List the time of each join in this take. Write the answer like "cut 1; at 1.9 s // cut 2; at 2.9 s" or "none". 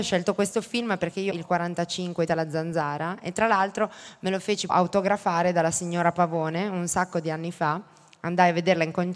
cut 1; at 1.3 s // cut 2; at 2.3 s // cut 3; at 4.7 s